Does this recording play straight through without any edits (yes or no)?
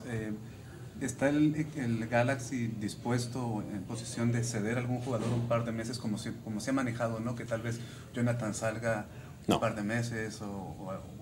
yes